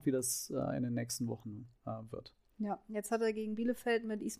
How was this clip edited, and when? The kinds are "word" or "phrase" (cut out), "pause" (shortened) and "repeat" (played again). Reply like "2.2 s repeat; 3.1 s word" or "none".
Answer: 1.8 s pause